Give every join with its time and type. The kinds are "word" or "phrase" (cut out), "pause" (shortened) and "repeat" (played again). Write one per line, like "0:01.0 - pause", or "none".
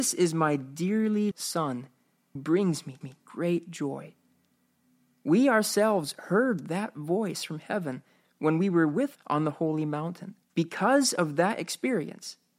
0:01.3 - word
0:02.3 - word
0:03.0 - repeat
0:09.1 - word
0:10.4 - pause